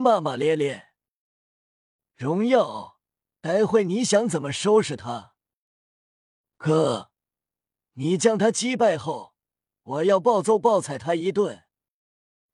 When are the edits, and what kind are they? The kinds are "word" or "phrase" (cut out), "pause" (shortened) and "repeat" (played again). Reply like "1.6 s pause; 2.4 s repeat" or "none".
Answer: none